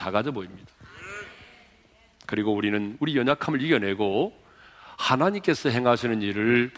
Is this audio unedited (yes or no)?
yes